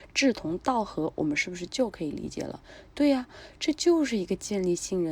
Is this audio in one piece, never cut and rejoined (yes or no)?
yes